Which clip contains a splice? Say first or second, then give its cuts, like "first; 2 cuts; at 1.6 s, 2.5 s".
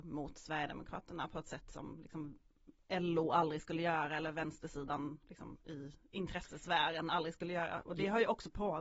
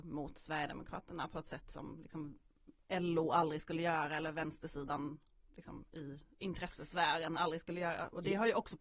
first; 1 cut; at 5.2 s